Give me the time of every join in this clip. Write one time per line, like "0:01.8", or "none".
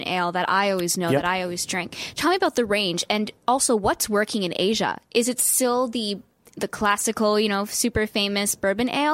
none